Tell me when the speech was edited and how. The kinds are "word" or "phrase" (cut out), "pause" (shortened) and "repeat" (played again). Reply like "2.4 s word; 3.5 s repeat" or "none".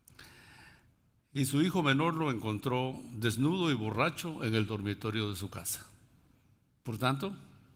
none